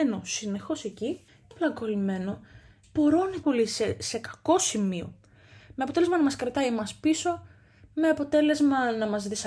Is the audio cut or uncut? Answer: cut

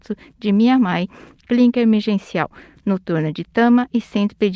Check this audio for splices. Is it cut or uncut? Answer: uncut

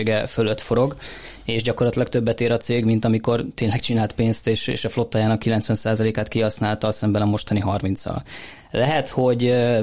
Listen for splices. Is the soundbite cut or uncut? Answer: uncut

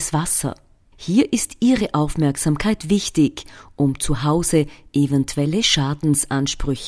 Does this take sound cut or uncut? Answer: uncut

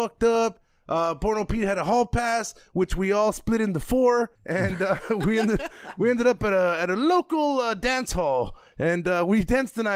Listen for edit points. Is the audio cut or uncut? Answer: cut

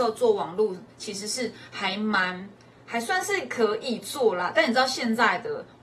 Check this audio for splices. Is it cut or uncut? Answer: uncut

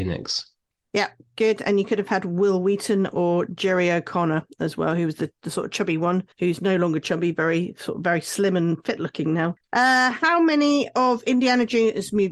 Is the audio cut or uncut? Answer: cut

